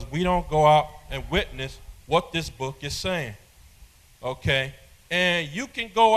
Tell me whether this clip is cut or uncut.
uncut